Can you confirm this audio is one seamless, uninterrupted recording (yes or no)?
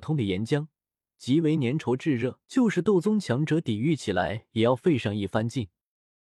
no